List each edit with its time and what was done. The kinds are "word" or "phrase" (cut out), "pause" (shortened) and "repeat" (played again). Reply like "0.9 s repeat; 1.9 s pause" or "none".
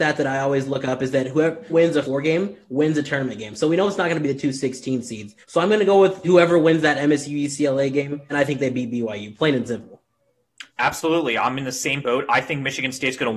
1.7 s phrase; 2.0 s word; 5.4 s pause; 6.2 s word; 8.3 s phrase; 10.7 s pause